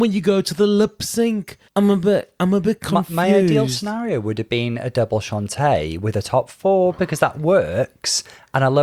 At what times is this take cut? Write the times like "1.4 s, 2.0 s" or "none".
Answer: 1.7 s